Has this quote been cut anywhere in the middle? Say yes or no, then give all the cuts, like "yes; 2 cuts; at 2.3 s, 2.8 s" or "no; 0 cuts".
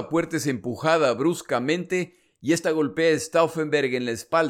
no; 0 cuts